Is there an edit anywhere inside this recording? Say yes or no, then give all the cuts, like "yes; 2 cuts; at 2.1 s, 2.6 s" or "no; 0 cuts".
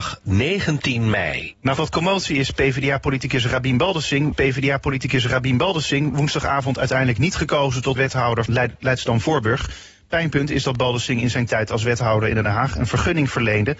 yes; 4 cuts; at 1.8 s, 4.3 s, 8.0 s, 8.5 s